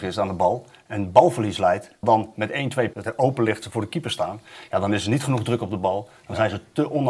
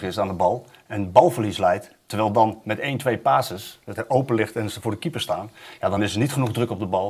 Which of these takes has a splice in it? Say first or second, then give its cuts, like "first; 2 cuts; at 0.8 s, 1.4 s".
first; 3 cuts; at 2.0 s, 2.9 s, 3.6 s